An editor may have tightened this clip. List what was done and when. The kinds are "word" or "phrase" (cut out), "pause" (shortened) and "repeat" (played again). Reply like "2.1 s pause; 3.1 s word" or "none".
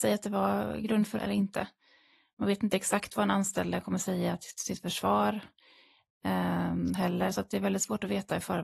1.2 s phrase